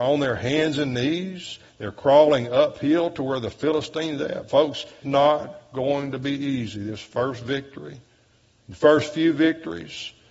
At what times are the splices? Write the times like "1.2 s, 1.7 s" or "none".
5.0 s